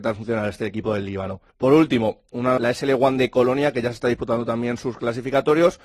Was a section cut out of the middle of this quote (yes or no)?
yes